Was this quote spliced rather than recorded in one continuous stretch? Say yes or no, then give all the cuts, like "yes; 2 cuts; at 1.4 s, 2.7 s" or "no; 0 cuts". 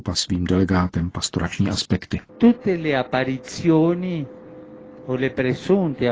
yes; 2 cuts; at 1.1 s, 2.3 s